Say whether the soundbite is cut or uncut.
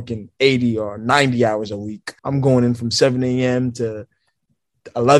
cut